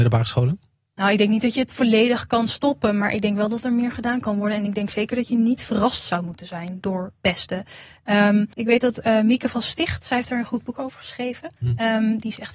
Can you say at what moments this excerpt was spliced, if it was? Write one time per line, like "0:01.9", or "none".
0:08.5
0:11.6